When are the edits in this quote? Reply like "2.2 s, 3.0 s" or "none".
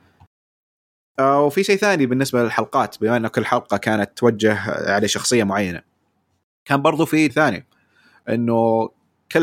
7.3 s